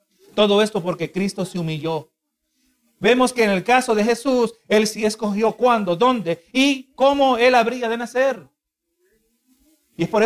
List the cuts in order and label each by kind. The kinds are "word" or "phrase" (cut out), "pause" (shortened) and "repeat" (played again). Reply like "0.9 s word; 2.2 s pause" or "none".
none